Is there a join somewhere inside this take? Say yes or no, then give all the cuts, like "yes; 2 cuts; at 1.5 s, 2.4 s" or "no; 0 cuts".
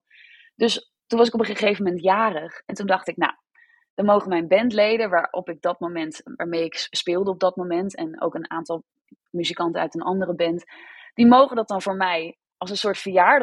no; 0 cuts